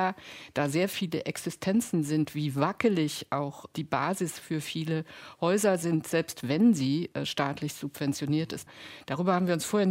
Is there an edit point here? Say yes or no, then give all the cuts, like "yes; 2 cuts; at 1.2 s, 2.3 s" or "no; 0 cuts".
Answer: no; 0 cuts